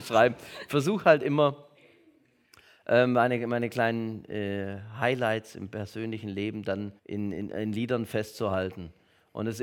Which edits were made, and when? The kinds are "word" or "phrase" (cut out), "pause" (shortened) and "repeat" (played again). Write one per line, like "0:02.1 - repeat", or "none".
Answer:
0:07.0 - pause